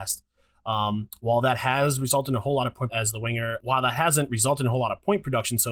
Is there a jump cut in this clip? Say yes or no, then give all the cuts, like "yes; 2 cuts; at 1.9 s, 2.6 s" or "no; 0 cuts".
yes; 2 cuts; at 2.9 s, 3.6 s